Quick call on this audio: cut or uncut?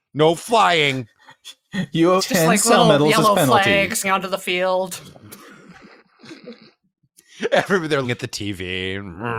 cut